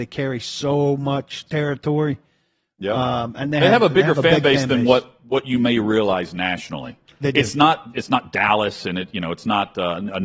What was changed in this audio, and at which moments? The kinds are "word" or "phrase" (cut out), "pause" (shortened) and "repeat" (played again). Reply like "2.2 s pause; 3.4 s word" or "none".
none